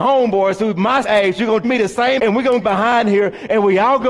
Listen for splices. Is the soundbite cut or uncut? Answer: cut